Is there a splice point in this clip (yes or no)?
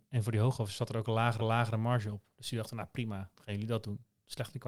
yes